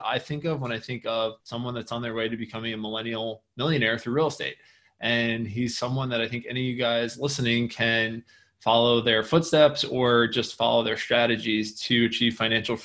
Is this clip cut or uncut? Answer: cut